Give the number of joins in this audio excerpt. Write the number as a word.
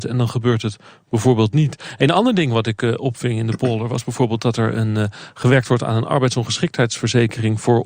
zero